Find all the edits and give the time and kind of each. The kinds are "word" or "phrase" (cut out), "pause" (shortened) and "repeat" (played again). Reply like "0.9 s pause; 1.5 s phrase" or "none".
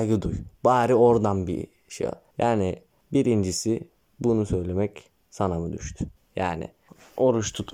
none